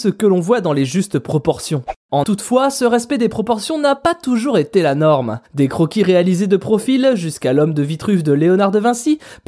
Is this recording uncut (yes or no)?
no